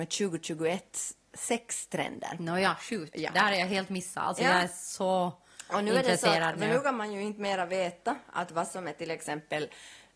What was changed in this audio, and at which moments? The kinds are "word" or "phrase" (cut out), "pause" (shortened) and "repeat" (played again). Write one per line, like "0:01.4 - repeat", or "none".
none